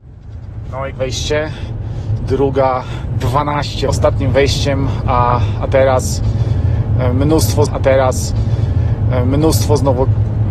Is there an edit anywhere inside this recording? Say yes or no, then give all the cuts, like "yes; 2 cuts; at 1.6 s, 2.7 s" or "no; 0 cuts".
yes; 3 cuts; at 0.9 s, 3.9 s, 7.7 s